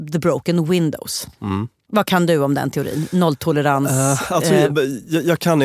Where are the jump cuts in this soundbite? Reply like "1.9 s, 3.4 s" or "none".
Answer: none